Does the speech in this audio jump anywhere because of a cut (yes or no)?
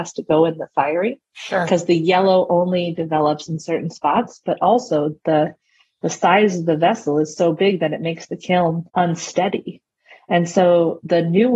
yes